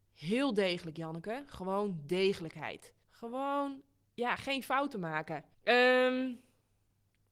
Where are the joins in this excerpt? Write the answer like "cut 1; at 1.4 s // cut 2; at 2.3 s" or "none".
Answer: cut 1; at 3.0 s // cut 2; at 5.5 s